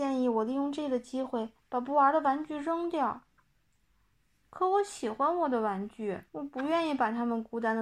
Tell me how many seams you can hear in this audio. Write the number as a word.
one